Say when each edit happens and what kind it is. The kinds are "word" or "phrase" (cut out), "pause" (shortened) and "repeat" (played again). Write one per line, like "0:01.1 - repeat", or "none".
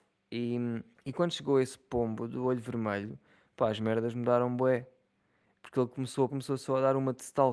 0:00.9 - pause
0:06.3 - word